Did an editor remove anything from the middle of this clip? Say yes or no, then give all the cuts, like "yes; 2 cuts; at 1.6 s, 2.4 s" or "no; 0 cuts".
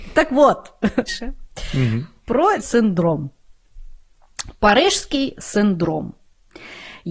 yes; 2 cuts; at 1.1 s, 2.6 s